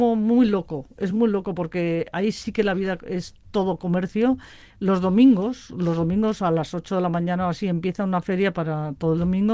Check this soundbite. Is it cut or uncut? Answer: uncut